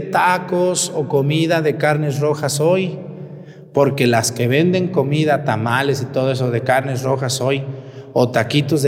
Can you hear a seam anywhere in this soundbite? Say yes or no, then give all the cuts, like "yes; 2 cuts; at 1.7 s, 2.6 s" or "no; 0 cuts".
no; 0 cuts